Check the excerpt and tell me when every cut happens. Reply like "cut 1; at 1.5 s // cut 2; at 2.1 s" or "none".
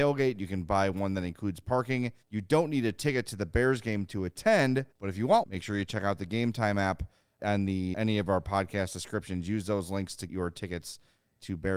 cut 1; at 2.2 s // cut 2; at 4.9 s // cut 3; at 5.4 s // cut 4; at 7.4 s // cut 5; at 7.9 s // cut 6; at 10.3 s